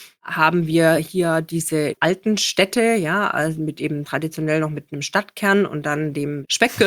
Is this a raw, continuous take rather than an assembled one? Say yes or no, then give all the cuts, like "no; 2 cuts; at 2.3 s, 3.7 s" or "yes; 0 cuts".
yes; 0 cuts